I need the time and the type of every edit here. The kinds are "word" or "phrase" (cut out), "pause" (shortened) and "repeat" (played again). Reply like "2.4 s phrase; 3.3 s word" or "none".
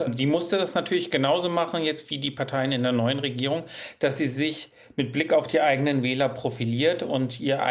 none